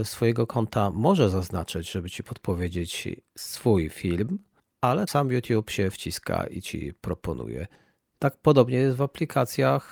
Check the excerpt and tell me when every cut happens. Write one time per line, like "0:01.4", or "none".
0:05.1